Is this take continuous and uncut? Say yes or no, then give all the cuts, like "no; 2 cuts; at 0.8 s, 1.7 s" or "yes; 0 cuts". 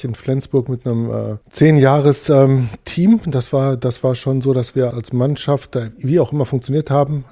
no; 2 cuts; at 1.4 s, 4.9 s